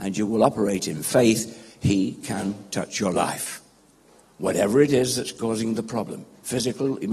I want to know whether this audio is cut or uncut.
uncut